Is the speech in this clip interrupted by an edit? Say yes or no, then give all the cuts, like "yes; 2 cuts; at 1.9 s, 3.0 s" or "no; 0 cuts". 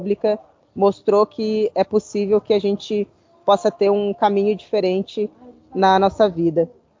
no; 0 cuts